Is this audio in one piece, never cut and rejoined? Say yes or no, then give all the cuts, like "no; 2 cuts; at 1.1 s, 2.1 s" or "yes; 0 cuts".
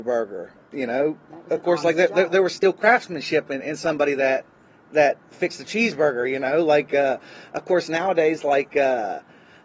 yes; 0 cuts